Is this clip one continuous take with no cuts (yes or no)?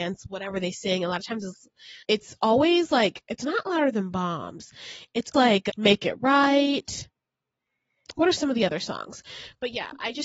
no